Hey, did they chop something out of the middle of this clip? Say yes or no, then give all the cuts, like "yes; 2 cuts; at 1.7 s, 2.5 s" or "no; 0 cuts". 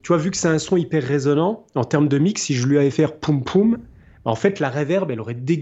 yes; 1 cut; at 2.9 s